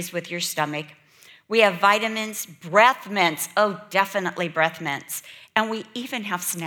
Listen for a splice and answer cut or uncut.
uncut